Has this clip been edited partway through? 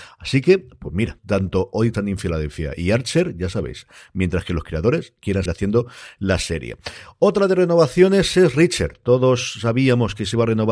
yes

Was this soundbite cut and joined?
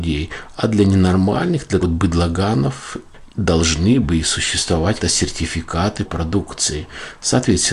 yes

